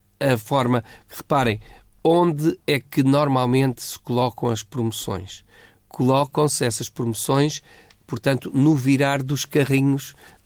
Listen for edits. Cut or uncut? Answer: uncut